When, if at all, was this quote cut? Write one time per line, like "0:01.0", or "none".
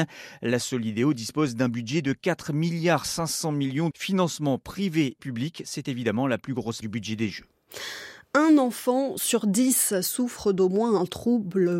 0:03.9
0:05.2
0:06.8